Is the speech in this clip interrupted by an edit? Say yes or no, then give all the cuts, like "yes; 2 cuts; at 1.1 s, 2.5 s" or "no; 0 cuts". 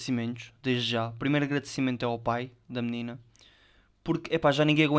no; 0 cuts